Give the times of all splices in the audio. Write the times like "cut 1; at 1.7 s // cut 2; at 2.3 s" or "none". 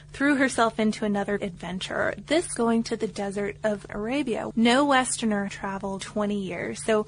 cut 1; at 1.4 s // cut 2; at 2.6 s // cut 3; at 3.9 s // cut 4; at 4.5 s // cut 5; at 5.5 s // cut 6; at 6.0 s